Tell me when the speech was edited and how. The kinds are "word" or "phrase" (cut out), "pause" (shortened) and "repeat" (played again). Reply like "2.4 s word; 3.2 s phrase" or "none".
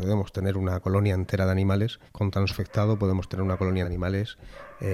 2.1 s pause; 2.5 s phrase; 3.8 s word